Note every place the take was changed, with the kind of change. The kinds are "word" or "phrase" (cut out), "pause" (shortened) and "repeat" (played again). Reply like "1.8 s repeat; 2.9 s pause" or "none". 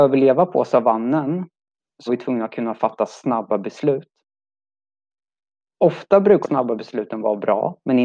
2.1 s word; 6.4 s word